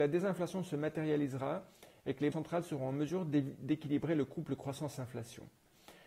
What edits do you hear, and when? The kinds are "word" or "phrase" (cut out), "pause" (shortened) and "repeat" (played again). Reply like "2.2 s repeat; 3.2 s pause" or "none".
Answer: 2.3 s word